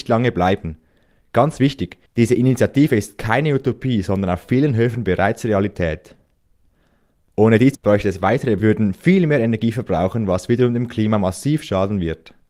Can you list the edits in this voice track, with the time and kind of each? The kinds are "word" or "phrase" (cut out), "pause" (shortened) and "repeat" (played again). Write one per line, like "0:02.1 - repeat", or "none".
0:02.1 - pause
0:07.7 - word
0:08.6 - phrase